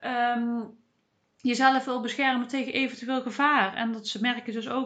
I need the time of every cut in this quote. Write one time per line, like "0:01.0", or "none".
none